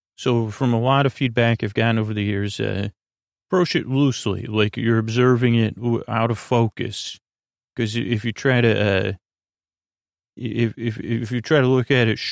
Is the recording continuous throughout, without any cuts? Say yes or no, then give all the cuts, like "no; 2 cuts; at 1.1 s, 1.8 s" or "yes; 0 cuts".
yes; 0 cuts